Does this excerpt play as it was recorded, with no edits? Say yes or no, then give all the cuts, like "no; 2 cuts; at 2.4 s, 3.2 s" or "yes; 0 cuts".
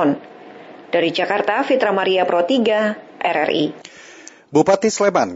yes; 0 cuts